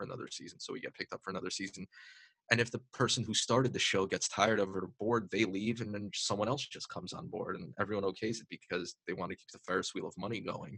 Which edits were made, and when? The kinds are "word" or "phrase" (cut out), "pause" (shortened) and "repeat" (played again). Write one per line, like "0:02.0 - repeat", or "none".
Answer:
none